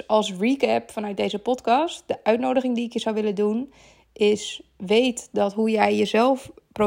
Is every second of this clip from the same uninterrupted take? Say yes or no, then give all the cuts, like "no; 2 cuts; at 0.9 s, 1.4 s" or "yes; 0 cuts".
yes; 0 cuts